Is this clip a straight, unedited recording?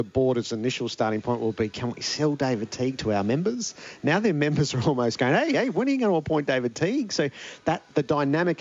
yes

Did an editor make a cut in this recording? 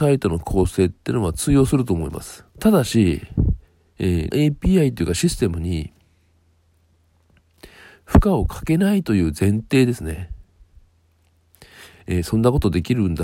yes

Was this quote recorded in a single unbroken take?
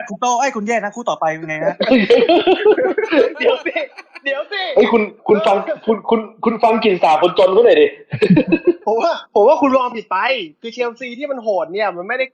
no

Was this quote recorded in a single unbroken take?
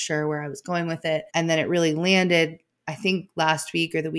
no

